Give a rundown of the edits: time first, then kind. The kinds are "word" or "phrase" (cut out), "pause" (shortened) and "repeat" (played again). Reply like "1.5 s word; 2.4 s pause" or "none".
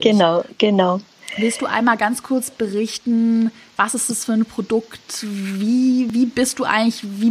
none